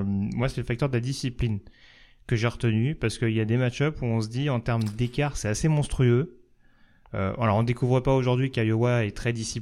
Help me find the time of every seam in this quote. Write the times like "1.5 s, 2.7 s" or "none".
none